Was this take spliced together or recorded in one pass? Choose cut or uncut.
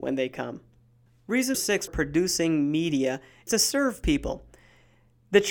cut